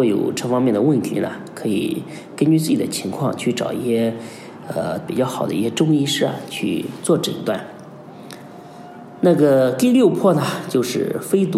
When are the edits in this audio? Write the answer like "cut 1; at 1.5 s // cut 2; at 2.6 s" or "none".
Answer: cut 1; at 5.1 s